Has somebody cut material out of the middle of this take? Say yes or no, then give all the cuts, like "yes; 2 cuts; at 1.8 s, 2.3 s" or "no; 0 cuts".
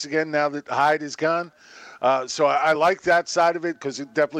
no; 0 cuts